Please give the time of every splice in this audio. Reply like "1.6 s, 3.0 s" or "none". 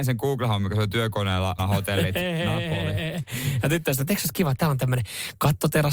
1.6 s